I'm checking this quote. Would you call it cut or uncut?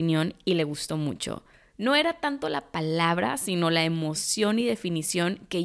uncut